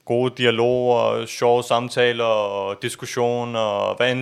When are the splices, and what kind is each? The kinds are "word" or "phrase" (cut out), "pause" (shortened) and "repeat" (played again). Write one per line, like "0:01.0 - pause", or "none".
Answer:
none